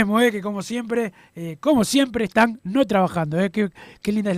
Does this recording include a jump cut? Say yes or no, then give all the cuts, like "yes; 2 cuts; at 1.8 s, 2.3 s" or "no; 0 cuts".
no; 0 cuts